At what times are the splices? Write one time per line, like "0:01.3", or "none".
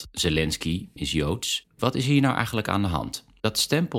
0:01.0
0:01.8